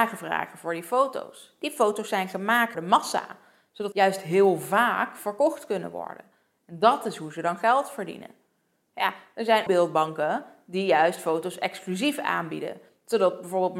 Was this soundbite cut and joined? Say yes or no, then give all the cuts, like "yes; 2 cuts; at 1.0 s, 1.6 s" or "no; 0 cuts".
yes; 3 cuts; at 2.7 s, 3.9 s, 9.7 s